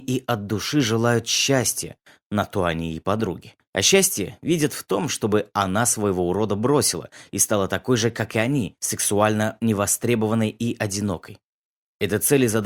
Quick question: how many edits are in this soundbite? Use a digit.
2